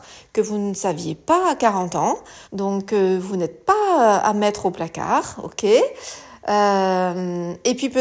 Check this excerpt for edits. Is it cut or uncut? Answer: cut